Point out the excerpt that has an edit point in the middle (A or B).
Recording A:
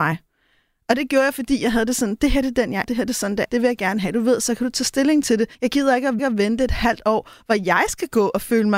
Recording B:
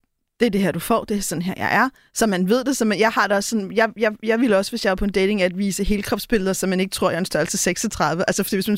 A